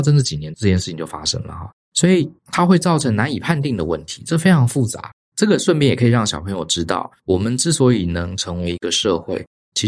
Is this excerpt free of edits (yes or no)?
no